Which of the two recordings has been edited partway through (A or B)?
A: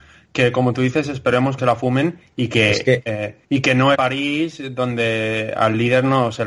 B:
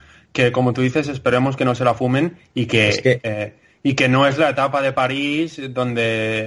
A